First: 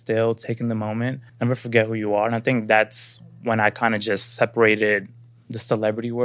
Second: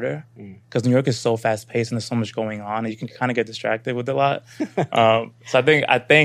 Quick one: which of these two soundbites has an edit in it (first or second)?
first